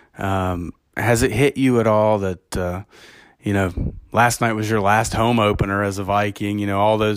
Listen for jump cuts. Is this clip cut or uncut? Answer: uncut